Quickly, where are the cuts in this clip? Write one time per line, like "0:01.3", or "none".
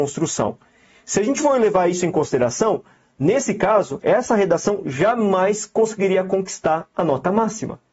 none